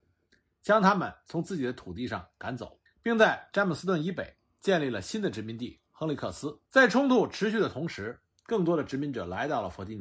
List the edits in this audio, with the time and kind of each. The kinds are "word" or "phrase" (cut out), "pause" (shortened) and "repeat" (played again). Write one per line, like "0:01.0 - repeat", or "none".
0:02.9 - pause
0:06.7 - pause